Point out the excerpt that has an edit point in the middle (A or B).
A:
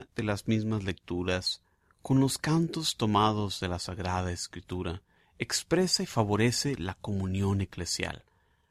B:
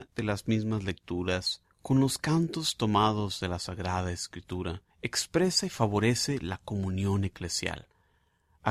B